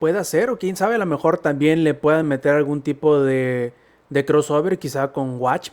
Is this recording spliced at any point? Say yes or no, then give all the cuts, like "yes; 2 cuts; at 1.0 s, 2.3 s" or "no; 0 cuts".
no; 0 cuts